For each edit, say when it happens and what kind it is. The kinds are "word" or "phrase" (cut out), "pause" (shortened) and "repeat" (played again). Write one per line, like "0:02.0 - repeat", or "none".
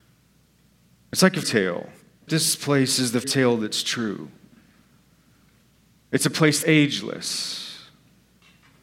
0:01.4 - word
0:02.3 - word
0:03.2 - word
0:06.6 - word